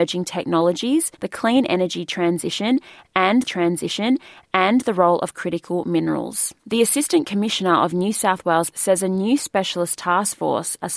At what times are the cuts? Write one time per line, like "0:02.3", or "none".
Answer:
0:01.1
0:03.4
0:06.6
0:08.7